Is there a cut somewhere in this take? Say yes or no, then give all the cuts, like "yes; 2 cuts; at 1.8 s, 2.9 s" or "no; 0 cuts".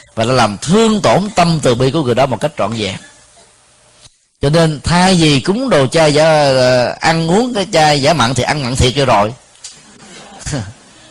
no; 0 cuts